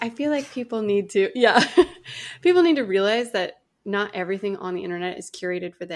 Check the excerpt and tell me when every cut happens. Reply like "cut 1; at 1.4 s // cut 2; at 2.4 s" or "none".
none